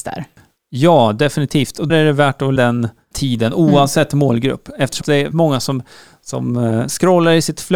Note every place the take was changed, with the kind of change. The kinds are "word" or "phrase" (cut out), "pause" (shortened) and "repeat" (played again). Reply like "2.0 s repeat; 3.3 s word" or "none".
1.9 s word; 2.6 s word; 3.1 s word; 5.0 s word; 5.3 s word